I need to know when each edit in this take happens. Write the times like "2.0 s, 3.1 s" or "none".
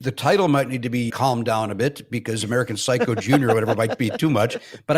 1.1 s

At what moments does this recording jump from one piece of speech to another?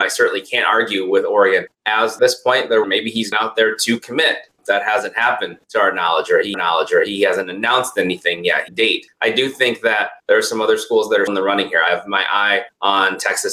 2.2 s, 2.8 s, 3.3 s, 6.5 s, 8.7 s, 10.2 s, 11.3 s

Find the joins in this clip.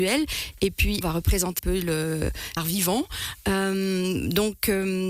1.0 s, 1.6 s, 2.6 s

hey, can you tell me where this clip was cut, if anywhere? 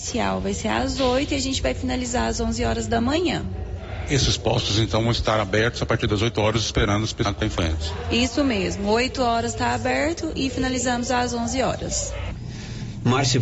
none

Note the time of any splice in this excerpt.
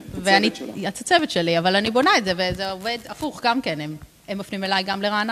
none

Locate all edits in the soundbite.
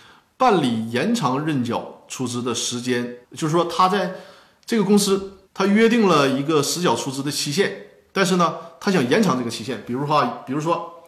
3.2 s, 5.5 s

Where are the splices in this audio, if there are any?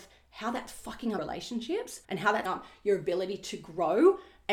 1.2 s, 2.0 s, 2.4 s

